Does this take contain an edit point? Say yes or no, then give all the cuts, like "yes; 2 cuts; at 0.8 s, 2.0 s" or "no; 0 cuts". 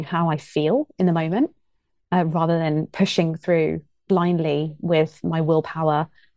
no; 0 cuts